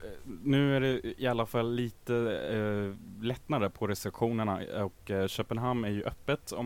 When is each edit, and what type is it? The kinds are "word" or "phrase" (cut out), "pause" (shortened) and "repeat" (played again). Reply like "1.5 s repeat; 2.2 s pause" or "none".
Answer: none